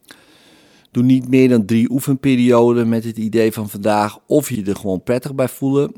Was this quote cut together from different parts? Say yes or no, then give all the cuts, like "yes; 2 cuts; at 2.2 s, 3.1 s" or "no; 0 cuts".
yes; 1 cut; at 4.5 s